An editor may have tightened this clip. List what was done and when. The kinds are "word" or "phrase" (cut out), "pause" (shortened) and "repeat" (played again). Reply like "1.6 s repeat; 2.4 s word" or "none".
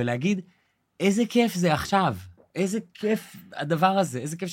2.4 s pause